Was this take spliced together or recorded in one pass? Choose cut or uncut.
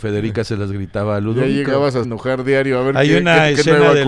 cut